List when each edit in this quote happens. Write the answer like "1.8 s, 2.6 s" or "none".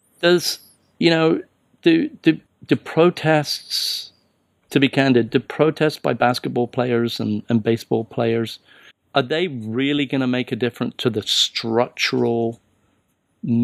2.5 s, 8.9 s